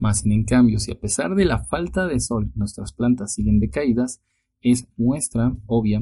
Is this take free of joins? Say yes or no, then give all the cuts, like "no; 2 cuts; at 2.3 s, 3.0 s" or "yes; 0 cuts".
yes; 0 cuts